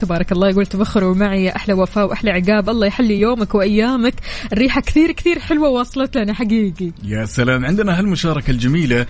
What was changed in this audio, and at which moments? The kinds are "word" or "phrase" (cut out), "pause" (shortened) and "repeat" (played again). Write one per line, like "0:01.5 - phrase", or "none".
none